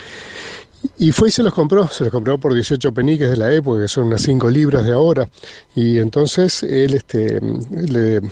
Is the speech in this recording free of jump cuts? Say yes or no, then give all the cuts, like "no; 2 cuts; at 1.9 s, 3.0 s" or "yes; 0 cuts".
yes; 0 cuts